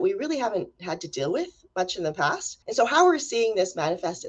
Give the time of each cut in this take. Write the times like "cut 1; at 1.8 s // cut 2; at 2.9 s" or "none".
cut 1; at 2.6 s